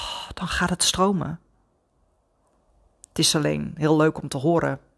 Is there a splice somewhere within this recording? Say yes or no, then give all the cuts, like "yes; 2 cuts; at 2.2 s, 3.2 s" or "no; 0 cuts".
no; 0 cuts